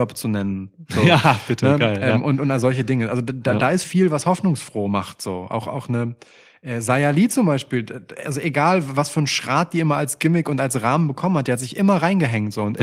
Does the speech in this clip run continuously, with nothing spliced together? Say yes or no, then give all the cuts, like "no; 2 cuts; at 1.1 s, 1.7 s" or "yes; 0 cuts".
no; 1 cut; at 3.8 s